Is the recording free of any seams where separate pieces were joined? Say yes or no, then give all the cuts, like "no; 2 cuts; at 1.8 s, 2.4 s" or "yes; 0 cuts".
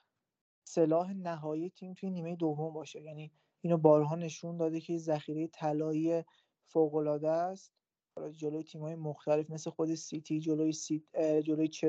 yes; 0 cuts